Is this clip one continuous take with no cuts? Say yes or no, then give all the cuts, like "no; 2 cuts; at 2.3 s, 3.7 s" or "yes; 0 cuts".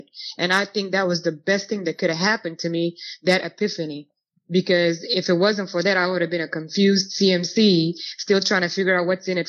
yes; 0 cuts